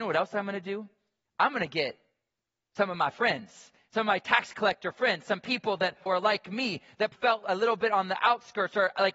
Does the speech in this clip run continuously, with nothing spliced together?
no; 2 cuts; at 6.1 s, 7.1 s

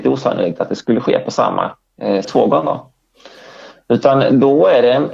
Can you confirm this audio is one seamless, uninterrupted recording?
no; 1 cut; at 2.2 s

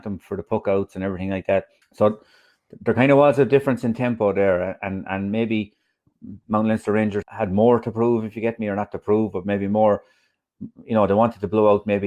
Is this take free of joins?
no; 2 cuts; at 1.8 s, 7.2 s

